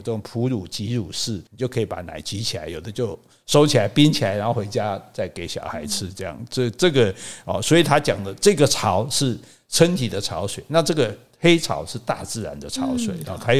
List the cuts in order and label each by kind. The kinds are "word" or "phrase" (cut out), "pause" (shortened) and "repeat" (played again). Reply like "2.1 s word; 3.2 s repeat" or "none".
1.5 s pause